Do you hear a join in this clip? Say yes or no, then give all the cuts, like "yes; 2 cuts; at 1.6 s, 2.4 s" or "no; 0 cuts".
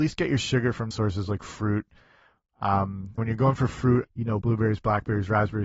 yes; 4 cuts; at 0.9 s, 3.2 s, 4.0 s, 4.4 s